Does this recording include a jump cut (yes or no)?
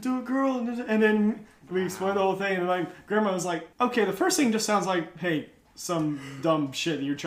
yes